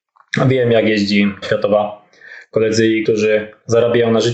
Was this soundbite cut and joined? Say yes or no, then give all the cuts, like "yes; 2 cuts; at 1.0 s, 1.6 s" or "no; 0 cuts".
yes; 2 cuts; at 1.4 s, 3.0 s